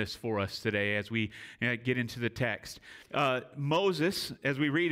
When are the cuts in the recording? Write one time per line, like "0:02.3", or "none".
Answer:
0:03.1